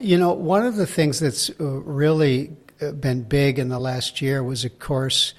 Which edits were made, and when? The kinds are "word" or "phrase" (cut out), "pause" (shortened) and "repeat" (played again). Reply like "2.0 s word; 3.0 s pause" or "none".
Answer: none

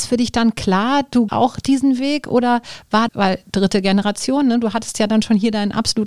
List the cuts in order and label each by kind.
1.3 s word; 3.1 s word

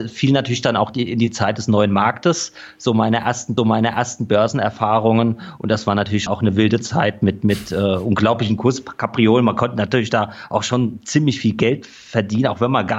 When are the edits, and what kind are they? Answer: 3.6 s repeat; 6.3 s word

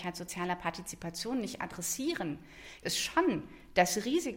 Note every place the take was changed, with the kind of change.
2.8 s word

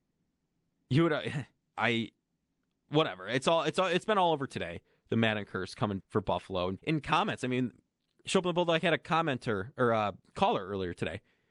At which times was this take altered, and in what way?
1.7 s word; 4.5 s word; 6.0 s word; 6.8 s word

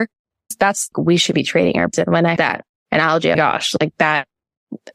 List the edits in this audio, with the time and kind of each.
0.9 s phrase; 1.9 s word; 2.4 s word; 3.3 s phrase

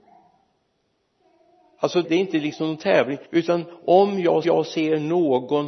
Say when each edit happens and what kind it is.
2.0 s word; 3.2 s pause; 4.4 s repeat

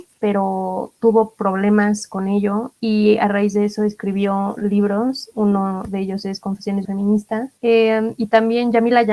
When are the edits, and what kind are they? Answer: 6.8 s phrase

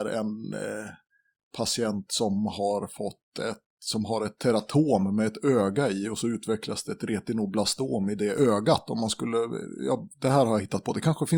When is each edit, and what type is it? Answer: none

